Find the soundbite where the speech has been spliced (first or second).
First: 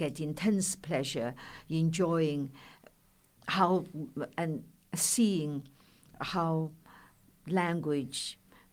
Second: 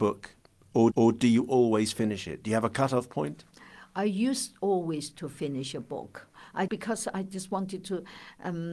second